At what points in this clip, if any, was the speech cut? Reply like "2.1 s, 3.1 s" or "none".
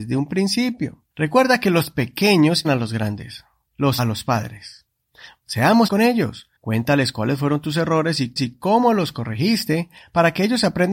1.1 s, 2.6 s, 4.0 s, 5.9 s, 6.6 s, 8.4 s